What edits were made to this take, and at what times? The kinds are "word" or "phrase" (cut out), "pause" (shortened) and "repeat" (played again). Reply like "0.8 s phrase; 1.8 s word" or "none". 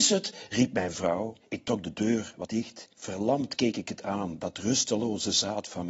1.4 s pause; 2.5 s word; 2.9 s pause